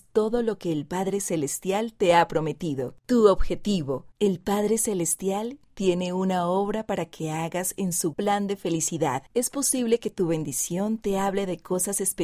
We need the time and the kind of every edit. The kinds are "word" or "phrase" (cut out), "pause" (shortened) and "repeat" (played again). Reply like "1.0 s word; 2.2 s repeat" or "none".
3.0 s pause; 4.1 s pause; 8.1 s word; 9.3 s pause